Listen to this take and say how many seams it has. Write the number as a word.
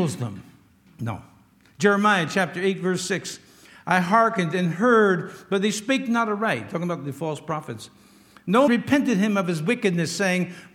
one